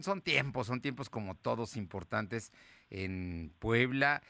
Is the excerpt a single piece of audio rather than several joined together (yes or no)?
yes